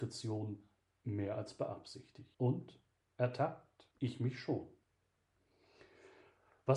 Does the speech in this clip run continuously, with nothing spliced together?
no; 2 cuts; at 2.3 s, 3.9 s

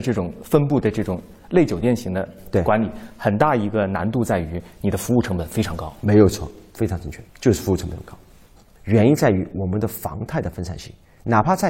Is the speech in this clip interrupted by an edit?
yes; 1 cut; at 7.3 s

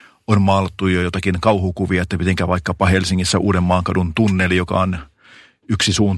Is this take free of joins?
yes; 0 cuts

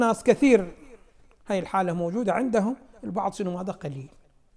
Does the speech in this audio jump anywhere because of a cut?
no; 0 cuts

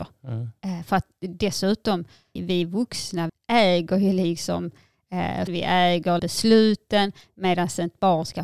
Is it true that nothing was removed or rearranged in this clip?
no; 4 cuts; at 2.4 s, 3.3 s, 5.5 s, 6.2 s

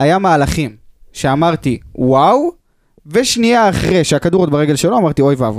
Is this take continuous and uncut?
yes; 0 cuts

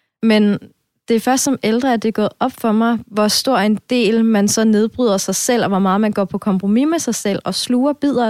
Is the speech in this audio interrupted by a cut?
no; 0 cuts

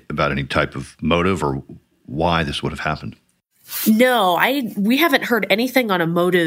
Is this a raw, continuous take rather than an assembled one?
yes; 0 cuts

